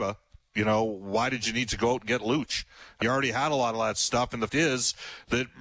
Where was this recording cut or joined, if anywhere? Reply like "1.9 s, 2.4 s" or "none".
3.0 s, 4.5 s